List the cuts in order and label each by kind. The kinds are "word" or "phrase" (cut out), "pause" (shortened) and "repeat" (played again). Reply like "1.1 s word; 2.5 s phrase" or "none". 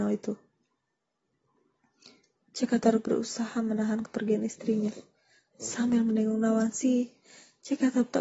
none